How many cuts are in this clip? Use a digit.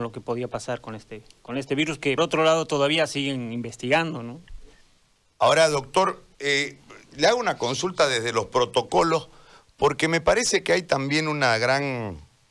2